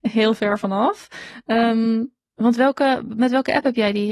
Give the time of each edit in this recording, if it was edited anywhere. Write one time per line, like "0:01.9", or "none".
none